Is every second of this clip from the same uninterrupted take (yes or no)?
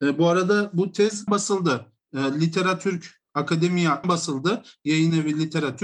no